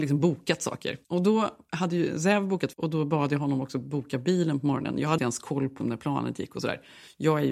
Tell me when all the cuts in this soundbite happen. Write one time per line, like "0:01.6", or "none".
0:01.0
0:02.7
0:05.2
0:05.8

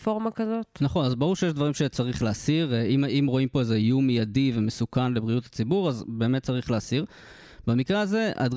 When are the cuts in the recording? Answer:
none

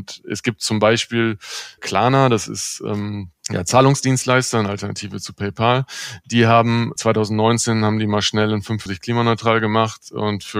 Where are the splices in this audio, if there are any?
0:01.8
0:03.4
0:07.0
0:08.9

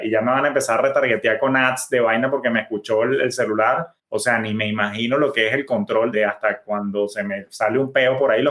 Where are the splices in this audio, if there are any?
0:04.0

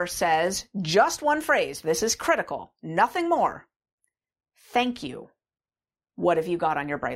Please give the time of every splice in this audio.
none

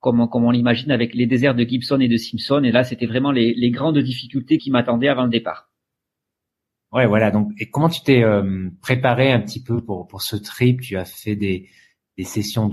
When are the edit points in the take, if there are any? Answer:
0:01.1
0:04.6

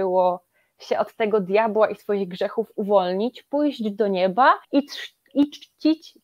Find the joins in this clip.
0:04.6

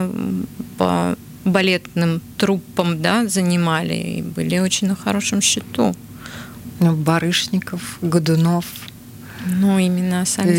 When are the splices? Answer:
none

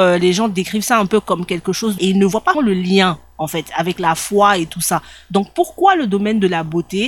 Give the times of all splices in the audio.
0:02.0
0:02.5

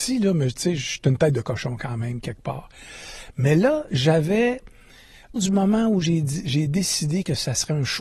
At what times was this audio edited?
0:05.4

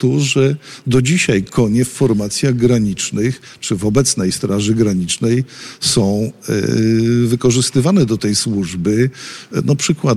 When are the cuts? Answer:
none

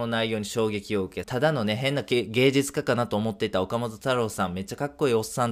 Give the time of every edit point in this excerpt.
0:01.2

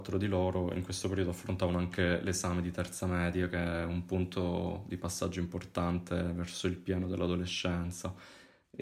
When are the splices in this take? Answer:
none

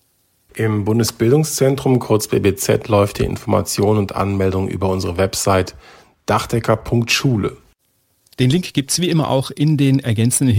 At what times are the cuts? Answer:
none

